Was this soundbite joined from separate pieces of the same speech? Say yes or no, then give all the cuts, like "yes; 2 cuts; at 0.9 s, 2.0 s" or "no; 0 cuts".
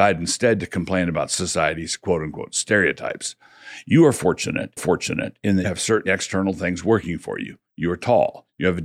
yes; 3 cuts; at 4.8 s, 5.6 s, 6.1 s